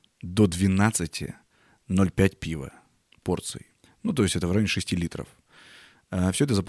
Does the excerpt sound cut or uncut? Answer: uncut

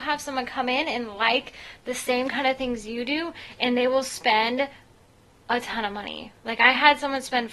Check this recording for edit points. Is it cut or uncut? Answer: uncut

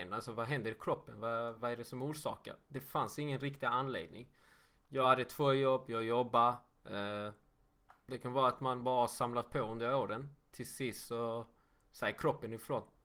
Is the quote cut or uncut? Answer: uncut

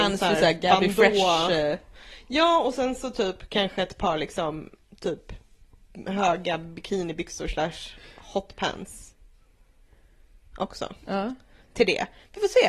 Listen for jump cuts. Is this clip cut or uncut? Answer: uncut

